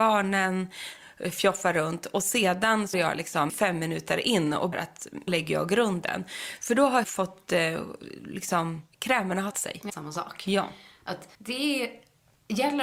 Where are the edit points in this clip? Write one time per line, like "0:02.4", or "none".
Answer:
0:02.9
0:03.5
0:04.7
0:05.3
0:07.0
0:09.5
0:09.9
0:11.3